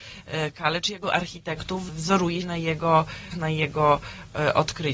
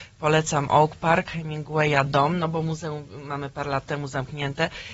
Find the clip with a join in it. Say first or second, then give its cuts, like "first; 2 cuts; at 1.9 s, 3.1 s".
first; 3 cuts; at 1.0 s, 2.4 s, 3.3 s